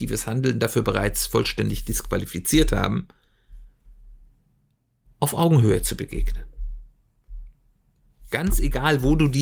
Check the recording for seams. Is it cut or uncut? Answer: uncut